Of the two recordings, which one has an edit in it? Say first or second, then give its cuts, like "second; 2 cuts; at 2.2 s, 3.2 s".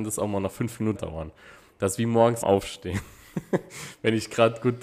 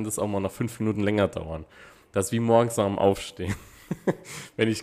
first; 2 cuts; at 0.9 s, 2.4 s